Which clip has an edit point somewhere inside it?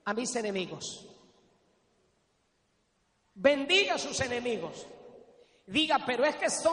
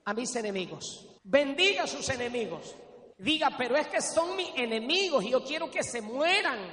second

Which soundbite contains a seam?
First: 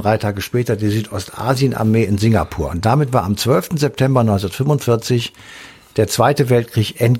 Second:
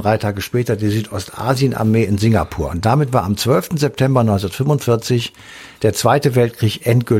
second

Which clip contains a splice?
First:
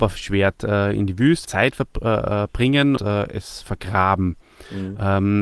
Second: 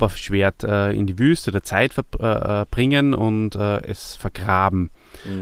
first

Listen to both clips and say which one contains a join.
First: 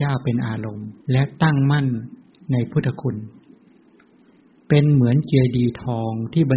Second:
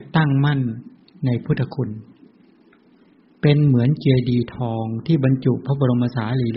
first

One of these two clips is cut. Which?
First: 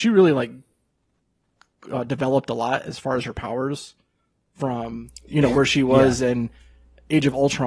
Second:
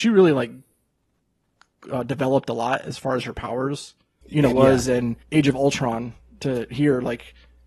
second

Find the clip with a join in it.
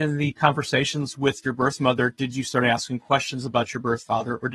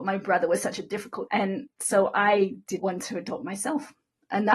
second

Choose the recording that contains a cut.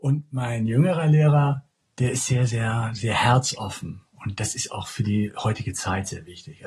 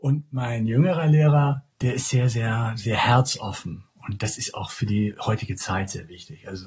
second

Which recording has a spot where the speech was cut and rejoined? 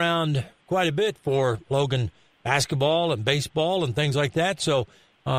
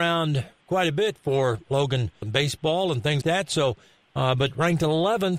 second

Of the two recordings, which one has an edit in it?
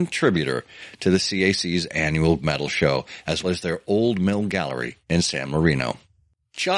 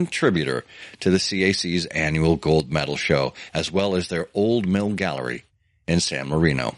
first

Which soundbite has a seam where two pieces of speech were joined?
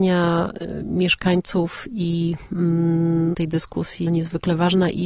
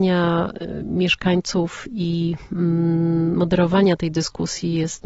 first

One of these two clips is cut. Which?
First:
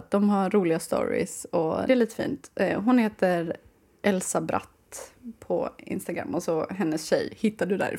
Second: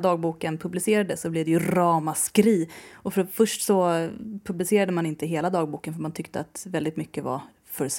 first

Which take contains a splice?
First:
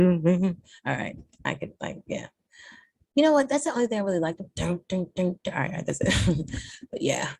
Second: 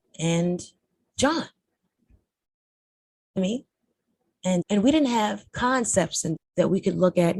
second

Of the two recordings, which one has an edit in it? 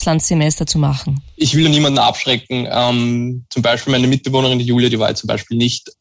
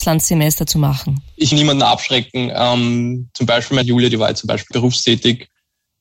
second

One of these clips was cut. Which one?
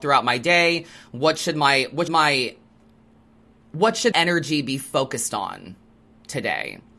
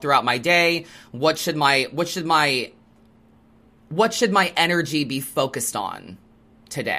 first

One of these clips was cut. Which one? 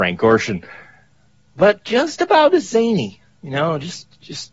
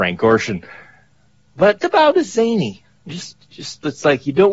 second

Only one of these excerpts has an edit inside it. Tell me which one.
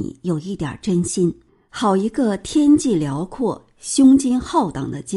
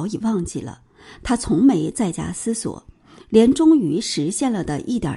first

